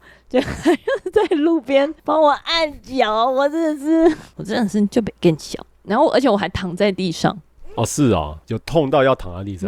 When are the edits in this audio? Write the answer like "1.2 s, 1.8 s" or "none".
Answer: 8.4 s